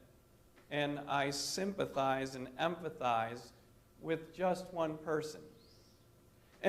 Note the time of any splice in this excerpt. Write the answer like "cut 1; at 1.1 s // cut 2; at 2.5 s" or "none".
cut 1; at 3.7 s